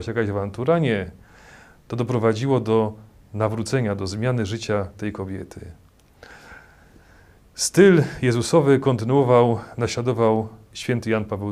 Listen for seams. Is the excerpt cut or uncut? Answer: uncut